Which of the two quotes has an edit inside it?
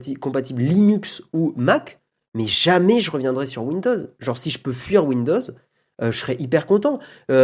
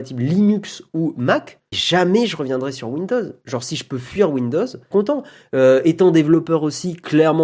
second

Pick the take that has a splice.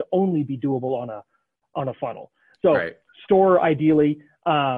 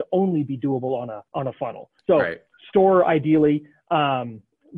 second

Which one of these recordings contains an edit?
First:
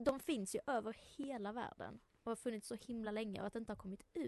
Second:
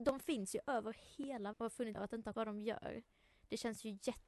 second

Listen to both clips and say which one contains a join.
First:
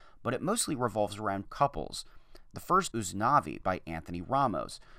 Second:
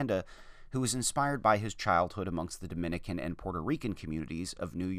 first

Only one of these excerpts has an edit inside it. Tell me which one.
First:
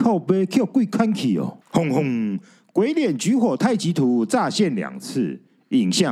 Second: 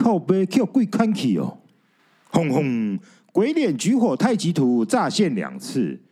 first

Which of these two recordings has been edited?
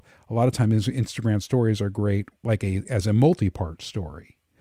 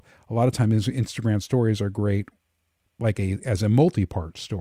first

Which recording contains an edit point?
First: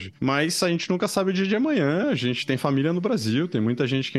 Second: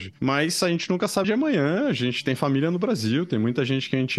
second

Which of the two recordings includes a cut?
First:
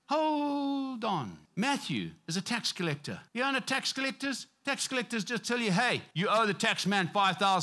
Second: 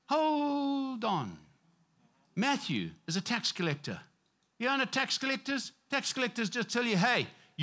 first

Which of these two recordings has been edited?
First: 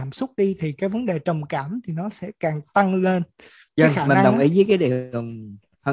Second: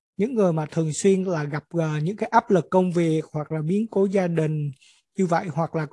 first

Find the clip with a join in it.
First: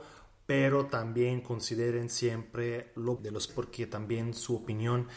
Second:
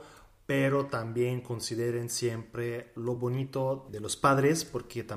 first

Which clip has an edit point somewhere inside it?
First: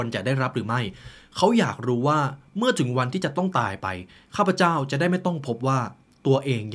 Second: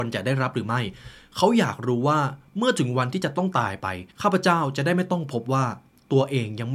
second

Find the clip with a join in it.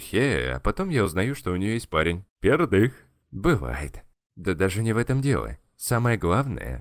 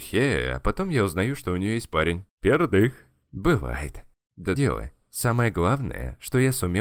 second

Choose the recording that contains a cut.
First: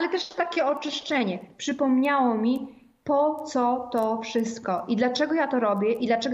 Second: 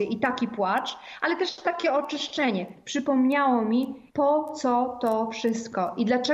second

